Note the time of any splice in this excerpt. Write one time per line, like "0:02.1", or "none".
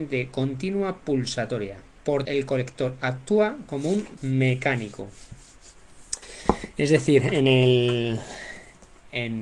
0:02.3
0:04.2

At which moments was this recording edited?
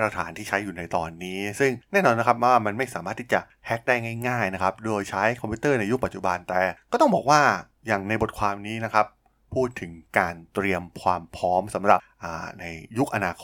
none

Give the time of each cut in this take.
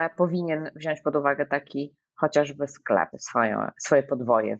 0:03.1

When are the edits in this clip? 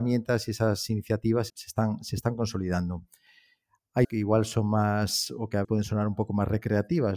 0:01.5
0:04.0
0:05.6

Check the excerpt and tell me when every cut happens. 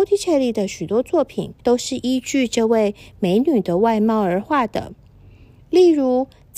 0:01.6

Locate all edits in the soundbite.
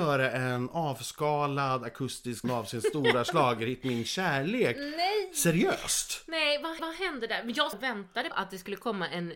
0:02.4
0:06.8
0:07.7
0:08.3

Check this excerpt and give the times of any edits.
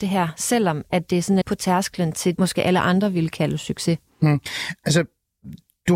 0:01.4
0:02.4

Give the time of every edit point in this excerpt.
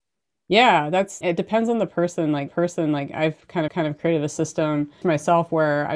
0:01.2
0:02.5
0:03.7
0:05.0

